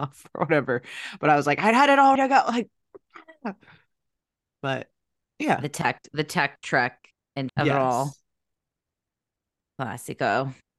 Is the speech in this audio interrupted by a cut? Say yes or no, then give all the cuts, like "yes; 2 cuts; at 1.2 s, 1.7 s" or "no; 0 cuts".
yes; 2 cuts; at 2.2 s, 7.5 s